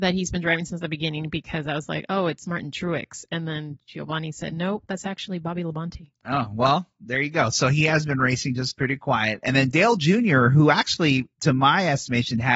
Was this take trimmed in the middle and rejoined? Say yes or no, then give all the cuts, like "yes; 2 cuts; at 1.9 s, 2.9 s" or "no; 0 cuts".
yes; 2 cuts; at 6.2 s, 11.3 s